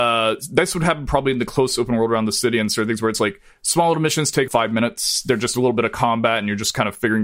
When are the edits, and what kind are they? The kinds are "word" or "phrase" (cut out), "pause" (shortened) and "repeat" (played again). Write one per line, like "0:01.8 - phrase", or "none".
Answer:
0:04.5 - word

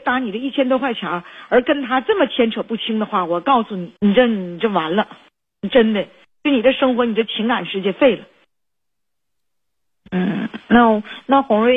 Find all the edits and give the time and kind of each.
0:04.0 - pause

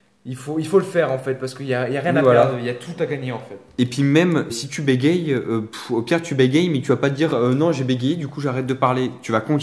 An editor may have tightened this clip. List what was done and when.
0:04.5 - word

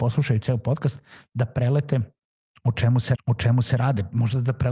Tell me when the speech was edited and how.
0:03.2 - repeat

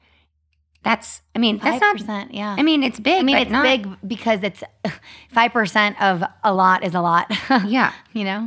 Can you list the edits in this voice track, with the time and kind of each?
none

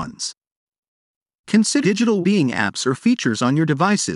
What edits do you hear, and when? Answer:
0:01.8 - word
0:02.2 - word

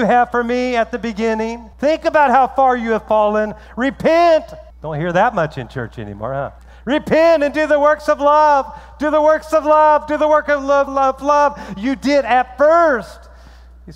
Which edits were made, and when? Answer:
0:01.7 - pause
0:04.7 - pause
0:06.6 - pause
0:10.9 - word

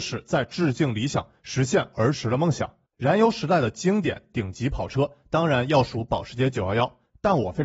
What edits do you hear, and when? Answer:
0:02.9 - pause

